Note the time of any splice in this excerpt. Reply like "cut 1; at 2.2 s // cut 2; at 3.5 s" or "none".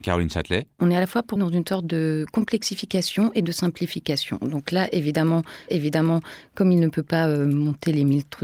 cut 1; at 1.4 s // cut 2; at 5.7 s